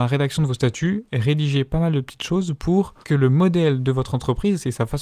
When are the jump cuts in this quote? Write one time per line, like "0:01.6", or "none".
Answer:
0:03.0